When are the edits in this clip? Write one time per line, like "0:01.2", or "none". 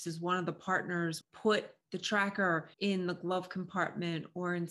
0:01.2
0:02.7